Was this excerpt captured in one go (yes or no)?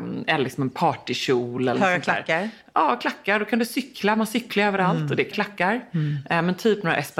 no